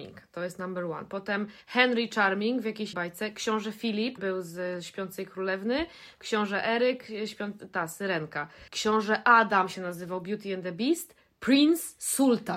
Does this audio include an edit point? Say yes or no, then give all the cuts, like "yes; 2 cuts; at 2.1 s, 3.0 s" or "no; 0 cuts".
yes; 4 cuts; at 1.6 s, 2.9 s, 4.2 s, 8.7 s